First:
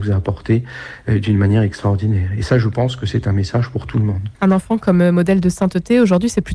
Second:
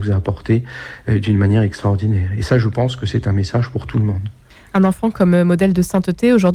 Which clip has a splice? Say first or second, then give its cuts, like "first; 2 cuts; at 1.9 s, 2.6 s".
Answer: first; 1 cut; at 4.3 s